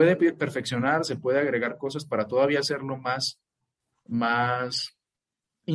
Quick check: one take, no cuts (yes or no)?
yes